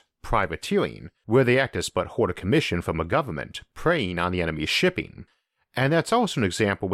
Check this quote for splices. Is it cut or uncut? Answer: cut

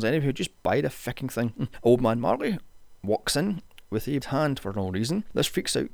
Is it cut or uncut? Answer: cut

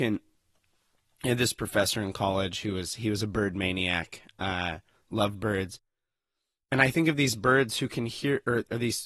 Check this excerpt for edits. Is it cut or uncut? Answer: uncut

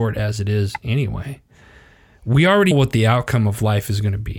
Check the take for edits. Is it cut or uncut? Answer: cut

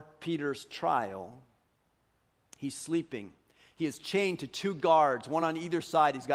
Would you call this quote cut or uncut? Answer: uncut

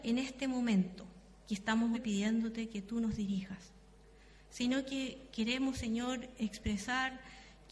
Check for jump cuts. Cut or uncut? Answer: cut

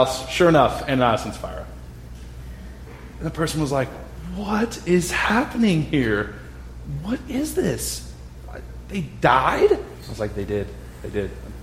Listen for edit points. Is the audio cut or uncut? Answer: uncut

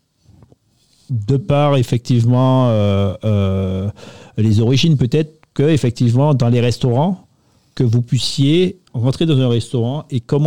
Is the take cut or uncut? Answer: uncut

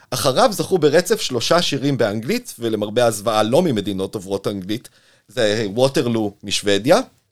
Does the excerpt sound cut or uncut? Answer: uncut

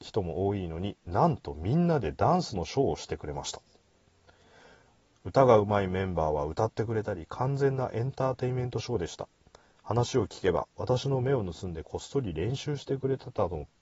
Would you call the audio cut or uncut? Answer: uncut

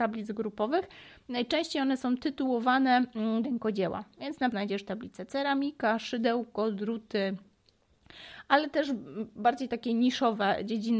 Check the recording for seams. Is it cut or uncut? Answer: cut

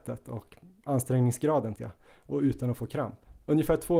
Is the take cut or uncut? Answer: cut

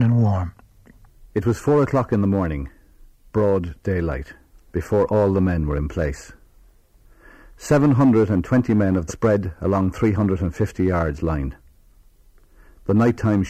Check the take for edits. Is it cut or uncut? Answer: cut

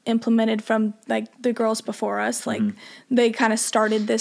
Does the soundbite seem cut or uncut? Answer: cut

